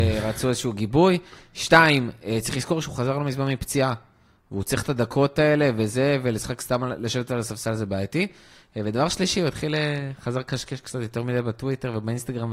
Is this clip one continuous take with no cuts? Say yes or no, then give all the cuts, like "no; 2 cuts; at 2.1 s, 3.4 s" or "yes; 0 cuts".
yes; 0 cuts